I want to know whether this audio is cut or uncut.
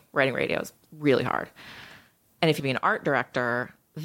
cut